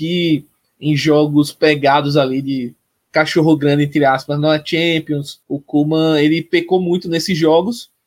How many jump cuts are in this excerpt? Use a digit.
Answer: 1